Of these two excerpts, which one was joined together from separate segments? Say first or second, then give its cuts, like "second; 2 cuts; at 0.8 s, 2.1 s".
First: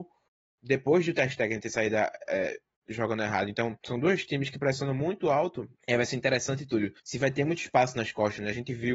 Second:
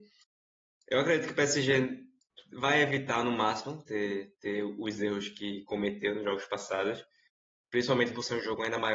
first; 3 cuts; at 3.8 s, 5.8 s, 7.0 s